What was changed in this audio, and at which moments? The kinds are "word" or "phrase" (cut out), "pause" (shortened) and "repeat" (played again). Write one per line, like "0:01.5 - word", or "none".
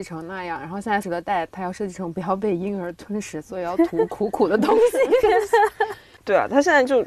0:01.0 - word